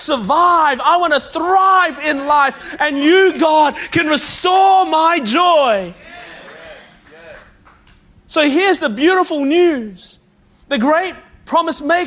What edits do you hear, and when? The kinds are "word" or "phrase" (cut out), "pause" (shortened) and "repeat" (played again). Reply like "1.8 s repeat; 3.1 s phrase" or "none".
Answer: none